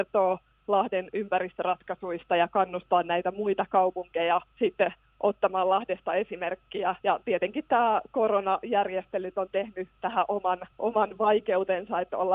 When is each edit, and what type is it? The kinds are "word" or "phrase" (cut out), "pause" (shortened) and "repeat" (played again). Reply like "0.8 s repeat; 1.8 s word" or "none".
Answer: 4.5 s pause; 7.0 s pause; 10.7 s pause